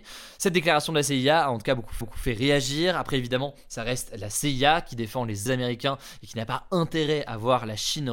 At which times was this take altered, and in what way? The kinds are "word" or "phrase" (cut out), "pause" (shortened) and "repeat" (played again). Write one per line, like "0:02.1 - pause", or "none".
0:02.0 - repeat
0:05.5 - phrase